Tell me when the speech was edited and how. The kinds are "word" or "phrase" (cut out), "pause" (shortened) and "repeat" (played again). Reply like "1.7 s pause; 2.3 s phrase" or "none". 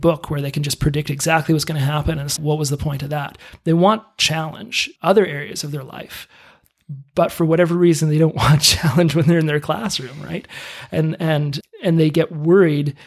2.4 s word; 5.0 s word; 11.6 s word